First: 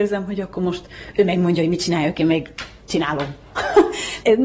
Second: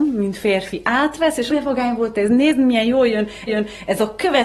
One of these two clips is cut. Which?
second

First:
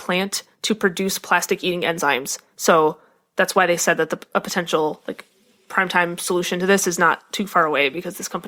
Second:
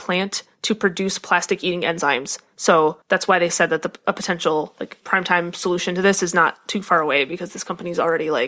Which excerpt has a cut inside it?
second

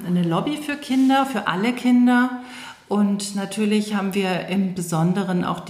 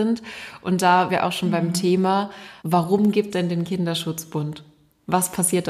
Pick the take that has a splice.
second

